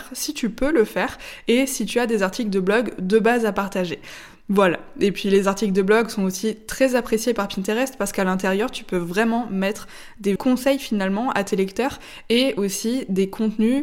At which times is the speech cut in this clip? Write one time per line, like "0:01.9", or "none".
0:10.4